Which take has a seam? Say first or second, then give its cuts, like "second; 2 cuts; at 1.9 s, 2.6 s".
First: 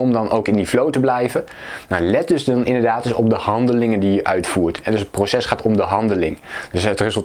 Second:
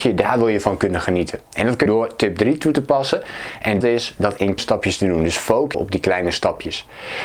second; 4 cuts; at 1.9 s, 3.8 s, 4.6 s, 5.7 s